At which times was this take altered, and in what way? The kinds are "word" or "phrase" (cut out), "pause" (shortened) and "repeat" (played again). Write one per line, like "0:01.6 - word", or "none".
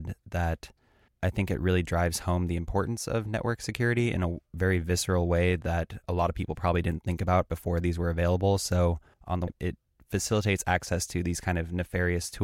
0:06.0 - pause
0:09.1 - pause
0:09.5 - phrase